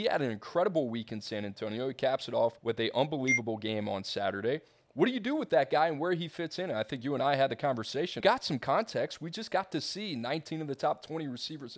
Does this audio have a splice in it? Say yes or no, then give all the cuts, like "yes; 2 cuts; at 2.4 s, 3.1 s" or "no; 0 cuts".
yes; 2 cuts; at 2.6 s, 8.2 s